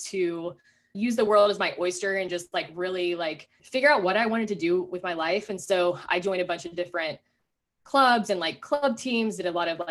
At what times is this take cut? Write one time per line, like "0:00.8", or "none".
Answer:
none